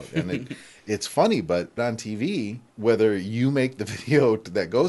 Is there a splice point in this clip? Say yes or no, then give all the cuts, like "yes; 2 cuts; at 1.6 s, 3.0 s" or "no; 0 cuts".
yes; 2 cuts; at 1.8 s, 2.7 s